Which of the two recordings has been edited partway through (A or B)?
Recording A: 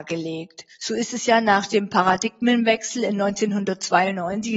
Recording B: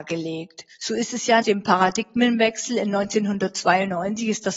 B